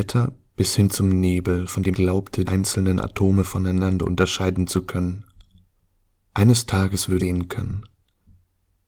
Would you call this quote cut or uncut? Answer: cut